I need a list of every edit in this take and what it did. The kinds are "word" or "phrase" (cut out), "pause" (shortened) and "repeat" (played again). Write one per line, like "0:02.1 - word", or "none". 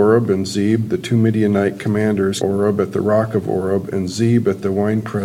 0:02.4 - word